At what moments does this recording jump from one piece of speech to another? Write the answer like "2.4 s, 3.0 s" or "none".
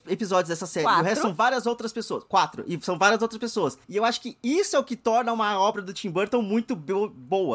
3.8 s